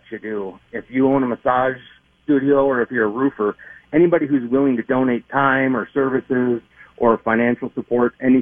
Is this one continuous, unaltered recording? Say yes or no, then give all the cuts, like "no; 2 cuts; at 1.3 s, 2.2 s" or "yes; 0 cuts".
yes; 0 cuts